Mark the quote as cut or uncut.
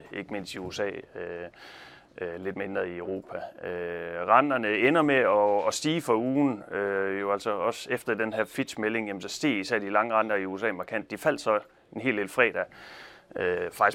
uncut